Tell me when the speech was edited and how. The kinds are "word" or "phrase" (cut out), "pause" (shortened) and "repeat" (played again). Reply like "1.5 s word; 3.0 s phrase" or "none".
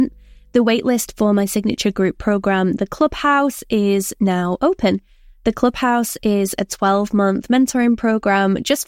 none